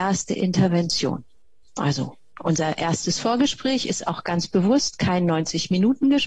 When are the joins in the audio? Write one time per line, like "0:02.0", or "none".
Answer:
none